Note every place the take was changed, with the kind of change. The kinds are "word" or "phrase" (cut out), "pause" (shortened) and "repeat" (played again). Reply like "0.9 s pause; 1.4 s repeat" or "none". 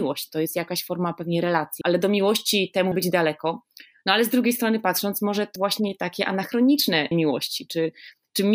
1.8 s word; 2.9 s word; 5.6 s word; 7.1 s word